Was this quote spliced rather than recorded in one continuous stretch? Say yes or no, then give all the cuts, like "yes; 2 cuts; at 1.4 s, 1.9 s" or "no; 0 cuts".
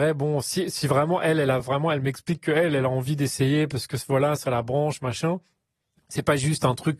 no; 0 cuts